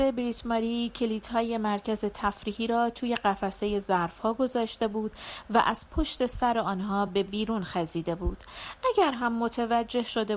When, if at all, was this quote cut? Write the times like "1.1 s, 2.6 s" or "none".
none